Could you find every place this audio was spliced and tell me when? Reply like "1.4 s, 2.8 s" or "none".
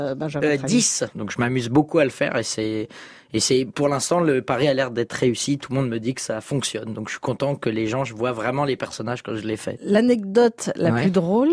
none